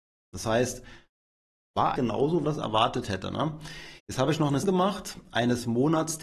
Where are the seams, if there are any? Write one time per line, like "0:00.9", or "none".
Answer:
0:02.0
0:02.4
0:04.0
0:04.6